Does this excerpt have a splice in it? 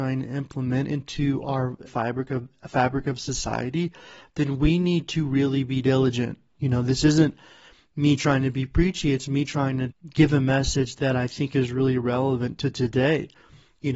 yes; 2 cuts; at 1.9 s, 9.9 s

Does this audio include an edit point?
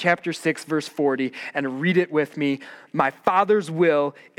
no; 0 cuts

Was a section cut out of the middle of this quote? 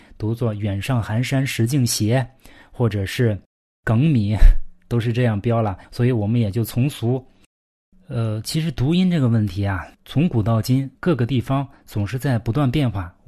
yes; 4 cuts; at 3.4 s, 5.8 s, 9.9 s, 10.9 s

